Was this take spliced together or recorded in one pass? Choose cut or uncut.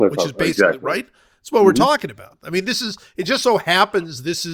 uncut